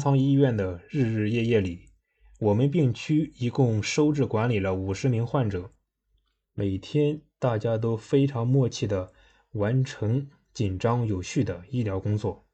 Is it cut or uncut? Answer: uncut